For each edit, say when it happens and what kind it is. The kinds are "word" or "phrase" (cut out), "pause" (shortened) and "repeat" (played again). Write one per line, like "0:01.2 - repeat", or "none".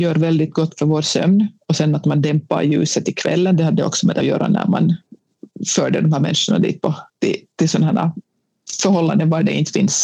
0:04.2 - phrase
0:07.1 - pause

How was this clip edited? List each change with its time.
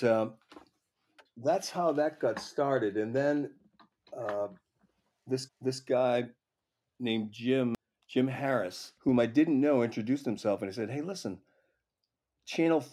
0:05.5 - repeat
0:09.0 - pause

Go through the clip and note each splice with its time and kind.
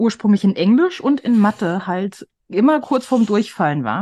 none

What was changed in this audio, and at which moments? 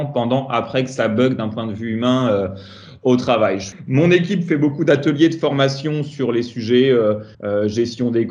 0:07.3 - pause

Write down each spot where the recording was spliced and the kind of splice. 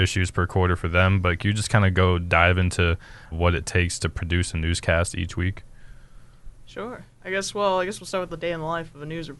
0:03.3 - word

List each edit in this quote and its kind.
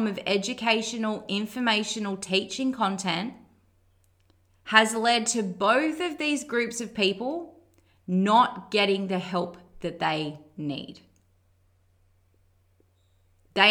none

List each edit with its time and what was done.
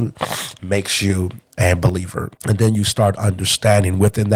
0:02.4 - pause

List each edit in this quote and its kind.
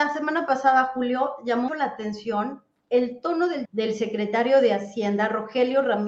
0:01.7 - word
0:03.6 - word

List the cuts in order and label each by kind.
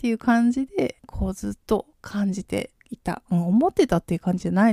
0:01.0 - pause
0:01.9 - pause
0:02.8 - pause

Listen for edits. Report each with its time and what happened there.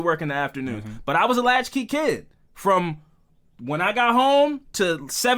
none

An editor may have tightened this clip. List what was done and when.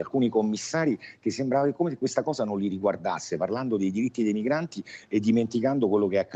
none

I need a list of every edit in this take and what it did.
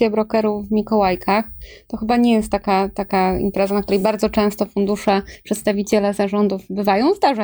none

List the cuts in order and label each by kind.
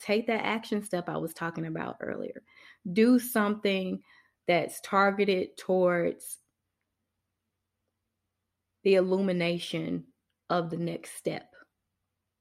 none

